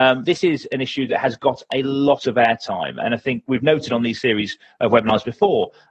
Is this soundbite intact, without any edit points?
yes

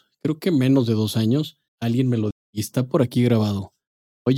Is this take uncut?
no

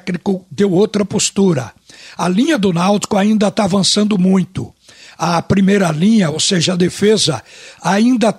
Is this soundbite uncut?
yes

